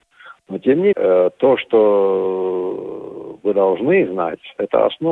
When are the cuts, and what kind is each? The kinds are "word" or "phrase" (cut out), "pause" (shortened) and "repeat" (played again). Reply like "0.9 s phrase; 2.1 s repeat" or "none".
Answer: 0.9 s word